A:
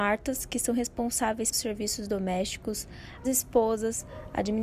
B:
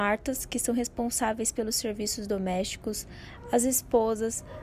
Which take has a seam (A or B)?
A